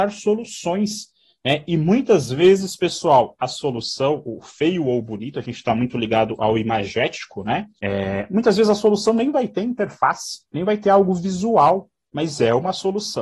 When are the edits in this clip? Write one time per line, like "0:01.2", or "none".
none